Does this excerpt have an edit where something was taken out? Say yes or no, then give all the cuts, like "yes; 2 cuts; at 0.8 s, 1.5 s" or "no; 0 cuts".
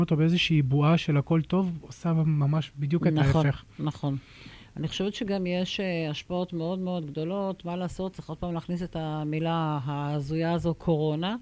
no; 0 cuts